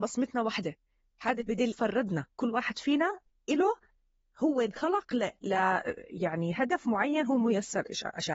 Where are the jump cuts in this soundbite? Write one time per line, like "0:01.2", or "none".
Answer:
0:01.7